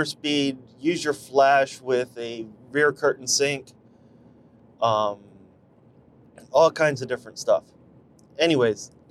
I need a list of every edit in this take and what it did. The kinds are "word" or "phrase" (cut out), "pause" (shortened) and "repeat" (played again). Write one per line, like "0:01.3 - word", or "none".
none